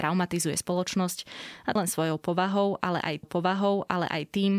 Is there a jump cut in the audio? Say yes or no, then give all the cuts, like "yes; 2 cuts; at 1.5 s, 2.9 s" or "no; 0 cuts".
yes; 2 cuts; at 1.8 s, 3.2 s